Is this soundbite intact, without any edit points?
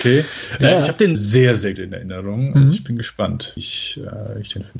no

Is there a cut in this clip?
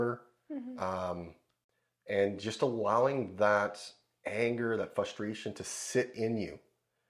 no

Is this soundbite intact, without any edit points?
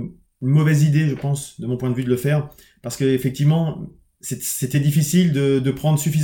yes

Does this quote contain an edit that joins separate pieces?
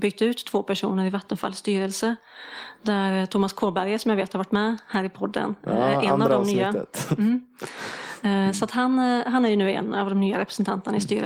no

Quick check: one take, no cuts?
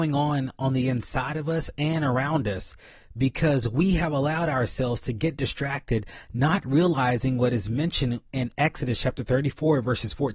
yes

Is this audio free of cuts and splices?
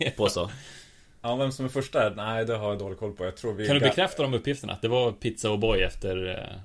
yes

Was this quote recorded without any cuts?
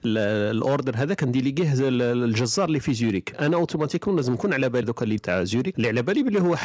no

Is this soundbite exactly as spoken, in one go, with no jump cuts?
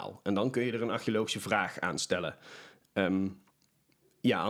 yes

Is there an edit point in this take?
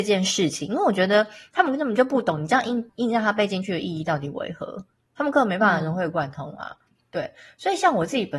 no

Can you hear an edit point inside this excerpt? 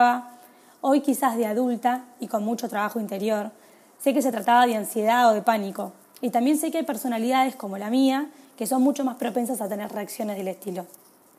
no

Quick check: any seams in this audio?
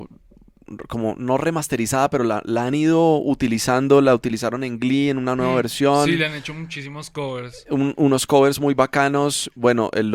no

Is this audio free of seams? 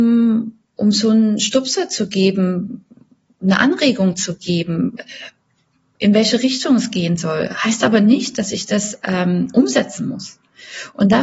yes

